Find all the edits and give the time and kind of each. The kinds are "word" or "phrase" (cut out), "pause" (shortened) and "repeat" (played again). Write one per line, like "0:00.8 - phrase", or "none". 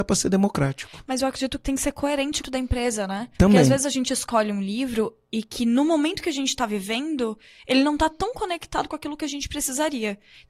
0:02.4 - phrase
0:03.3 - pause